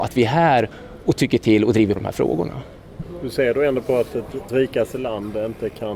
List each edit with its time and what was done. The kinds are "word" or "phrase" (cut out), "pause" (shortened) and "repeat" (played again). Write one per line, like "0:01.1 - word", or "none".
0:02.0 - word
0:04.5 - word

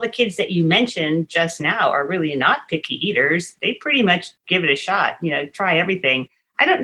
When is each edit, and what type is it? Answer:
0:04.4 - pause

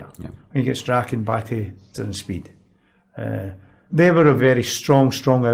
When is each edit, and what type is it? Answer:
0:01.9 - word
0:03.9 - word
0:04.4 - word

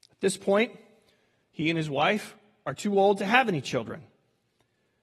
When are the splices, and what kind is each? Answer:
none

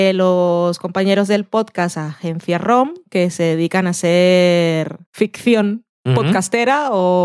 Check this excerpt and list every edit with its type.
0:05.1 - pause

